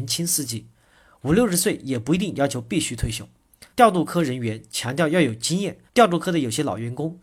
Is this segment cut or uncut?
cut